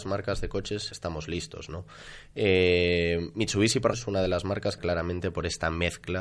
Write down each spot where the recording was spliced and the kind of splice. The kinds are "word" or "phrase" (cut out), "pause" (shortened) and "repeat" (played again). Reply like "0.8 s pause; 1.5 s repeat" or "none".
0.9 s word; 3.9 s word; 4.8 s word